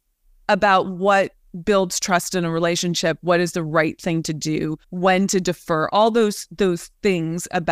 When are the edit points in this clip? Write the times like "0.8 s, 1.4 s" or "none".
4.8 s

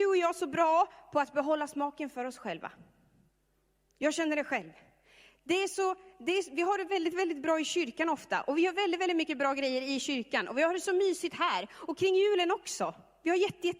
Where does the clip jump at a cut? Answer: none

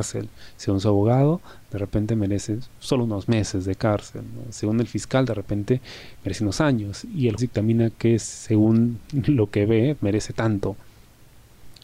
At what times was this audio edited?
7.4 s, 10.0 s

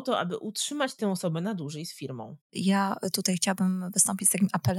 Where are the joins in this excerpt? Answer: 2.4 s

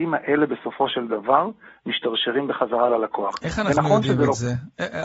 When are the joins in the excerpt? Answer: none

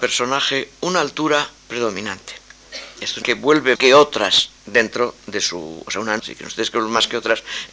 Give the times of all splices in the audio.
1.6 s, 3.2 s, 3.7 s, 4.6 s, 6.2 s

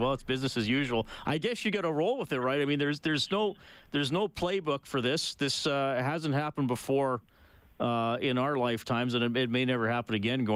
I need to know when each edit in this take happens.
none

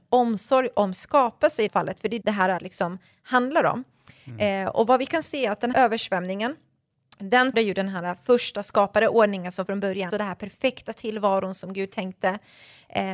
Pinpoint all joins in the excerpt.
0.9 s, 1.7 s, 2.2 s, 2.6 s, 5.7 s, 7.5 s, 9.7 s, 10.1 s

